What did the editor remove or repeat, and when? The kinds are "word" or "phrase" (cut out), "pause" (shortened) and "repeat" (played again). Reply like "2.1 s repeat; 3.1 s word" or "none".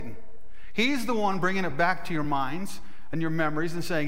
none